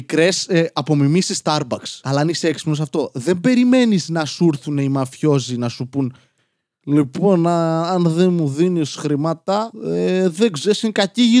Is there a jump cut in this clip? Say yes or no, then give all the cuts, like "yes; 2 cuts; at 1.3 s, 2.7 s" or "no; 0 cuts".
no; 0 cuts